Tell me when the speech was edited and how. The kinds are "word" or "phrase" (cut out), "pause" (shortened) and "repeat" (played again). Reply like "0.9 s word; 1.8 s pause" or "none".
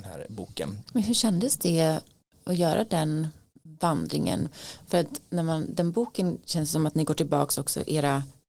none